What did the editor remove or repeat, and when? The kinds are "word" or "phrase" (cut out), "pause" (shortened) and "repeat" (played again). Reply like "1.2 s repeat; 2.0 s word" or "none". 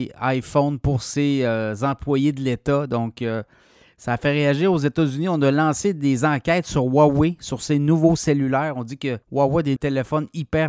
9.2 s pause; 9.8 s word